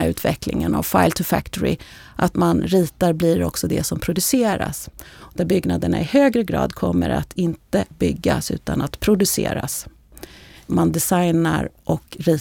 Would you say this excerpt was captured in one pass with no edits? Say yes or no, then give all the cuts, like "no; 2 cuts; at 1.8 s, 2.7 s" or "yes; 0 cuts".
yes; 0 cuts